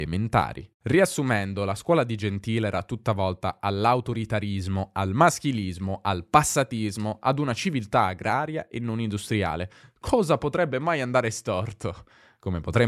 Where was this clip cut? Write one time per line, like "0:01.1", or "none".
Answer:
none